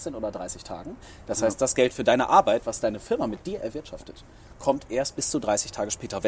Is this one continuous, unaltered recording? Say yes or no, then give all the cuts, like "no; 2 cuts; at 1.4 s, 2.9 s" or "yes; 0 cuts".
yes; 0 cuts